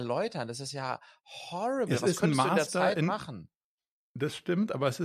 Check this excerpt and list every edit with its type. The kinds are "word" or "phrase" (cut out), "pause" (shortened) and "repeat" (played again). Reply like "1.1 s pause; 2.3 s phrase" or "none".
none